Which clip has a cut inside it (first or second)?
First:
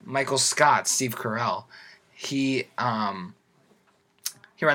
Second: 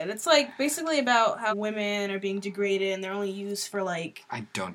second